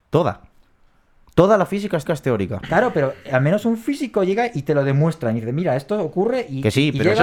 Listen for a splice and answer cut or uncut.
cut